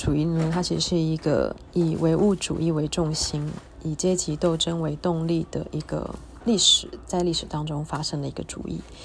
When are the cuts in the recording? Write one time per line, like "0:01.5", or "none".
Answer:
0:06.4